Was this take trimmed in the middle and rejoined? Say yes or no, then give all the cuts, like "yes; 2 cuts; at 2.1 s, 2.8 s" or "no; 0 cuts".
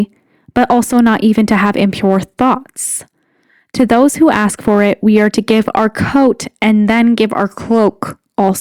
no; 0 cuts